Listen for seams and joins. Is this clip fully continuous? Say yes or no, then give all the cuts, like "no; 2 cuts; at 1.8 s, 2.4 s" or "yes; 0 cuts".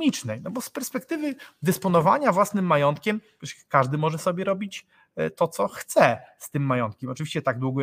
yes; 0 cuts